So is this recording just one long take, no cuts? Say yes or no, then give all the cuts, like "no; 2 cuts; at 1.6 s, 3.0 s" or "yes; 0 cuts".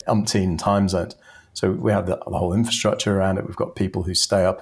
yes; 0 cuts